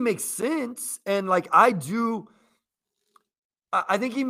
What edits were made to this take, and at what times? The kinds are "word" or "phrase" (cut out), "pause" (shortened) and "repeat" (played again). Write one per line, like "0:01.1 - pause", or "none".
none